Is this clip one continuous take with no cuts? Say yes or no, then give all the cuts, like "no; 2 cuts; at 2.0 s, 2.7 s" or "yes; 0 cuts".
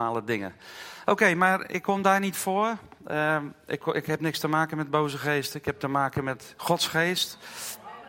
yes; 0 cuts